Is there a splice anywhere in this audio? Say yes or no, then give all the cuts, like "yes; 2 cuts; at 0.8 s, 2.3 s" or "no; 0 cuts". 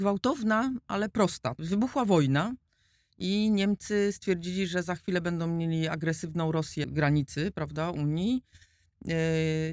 yes; 2 cuts; at 1.6 s, 6.8 s